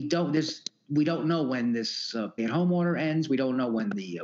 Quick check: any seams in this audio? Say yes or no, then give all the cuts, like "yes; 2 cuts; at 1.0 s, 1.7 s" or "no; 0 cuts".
yes; 1 cut; at 2.4 s